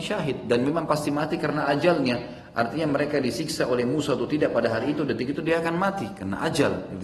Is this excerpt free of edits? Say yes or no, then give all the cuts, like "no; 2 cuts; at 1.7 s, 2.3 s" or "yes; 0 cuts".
yes; 0 cuts